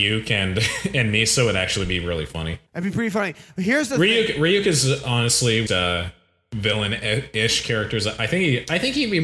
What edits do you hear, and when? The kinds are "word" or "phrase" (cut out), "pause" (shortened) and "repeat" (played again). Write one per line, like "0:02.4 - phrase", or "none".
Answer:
0:02.7 - pause
0:05.7 - phrase